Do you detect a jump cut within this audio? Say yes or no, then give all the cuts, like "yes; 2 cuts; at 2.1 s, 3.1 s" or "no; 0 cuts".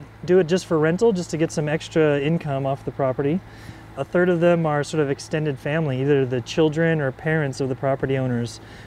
no; 0 cuts